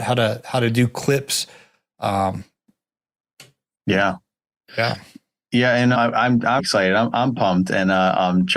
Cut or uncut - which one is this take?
cut